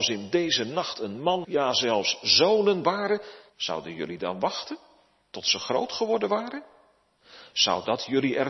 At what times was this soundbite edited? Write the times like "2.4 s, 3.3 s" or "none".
1.4 s, 3.5 s